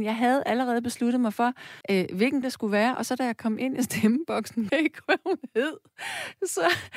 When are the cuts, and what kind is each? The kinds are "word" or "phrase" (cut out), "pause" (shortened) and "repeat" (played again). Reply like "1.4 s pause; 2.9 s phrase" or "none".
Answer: 1.8 s pause; 2.4 s word; 4.7 s word; 5.0 s word